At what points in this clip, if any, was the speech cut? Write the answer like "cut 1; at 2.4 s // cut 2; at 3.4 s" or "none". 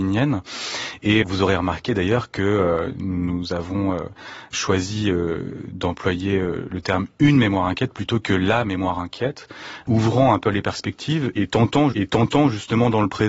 cut 1; at 1.2 s // cut 2; at 11.9 s

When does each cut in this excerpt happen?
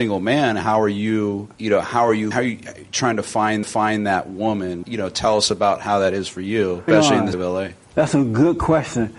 cut 1; at 1.5 s // cut 2; at 2.3 s // cut 3; at 3.6 s // cut 4; at 4.8 s // cut 5; at 6.9 s // cut 6; at 7.3 s

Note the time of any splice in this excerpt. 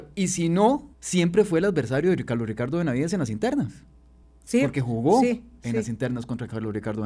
cut 1; at 0.9 s // cut 2; at 4.2 s

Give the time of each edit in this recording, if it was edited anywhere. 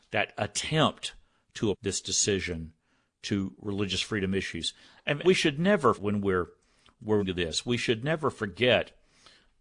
cut 1; at 1.7 s // cut 2; at 5.2 s // cut 3; at 6.0 s // cut 4; at 7.2 s

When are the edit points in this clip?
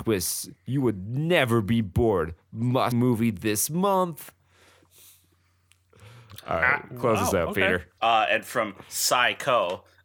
cut 1; at 2.9 s // cut 2; at 8.0 s

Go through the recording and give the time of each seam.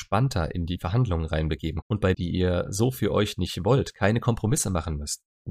cut 1; at 1.8 s // cut 2; at 2.1 s

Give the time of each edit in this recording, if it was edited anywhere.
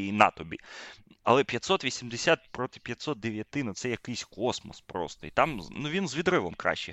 none

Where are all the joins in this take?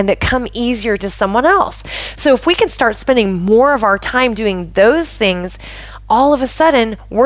cut 1; at 1.0 s

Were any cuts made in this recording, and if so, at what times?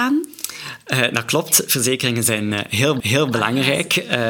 cut 1; at 3.0 s

